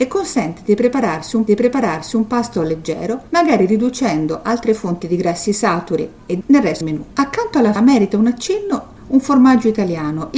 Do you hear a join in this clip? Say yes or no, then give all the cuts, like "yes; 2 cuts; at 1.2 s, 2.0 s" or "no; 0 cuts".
yes; 6 cuts; at 1.5 s, 3.3 s, 6.4 s, 6.8 s, 7.1 s, 7.8 s